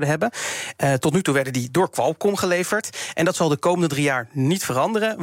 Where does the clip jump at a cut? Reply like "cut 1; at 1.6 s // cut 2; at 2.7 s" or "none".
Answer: none

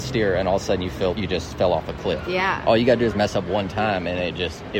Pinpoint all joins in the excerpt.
cut 1; at 1.1 s

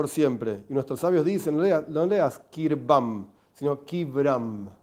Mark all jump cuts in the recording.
none

